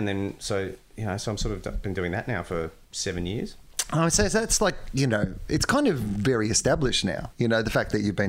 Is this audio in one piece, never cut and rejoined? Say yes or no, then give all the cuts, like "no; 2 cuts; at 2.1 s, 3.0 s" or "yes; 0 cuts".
no; 1 cut; at 2.8 s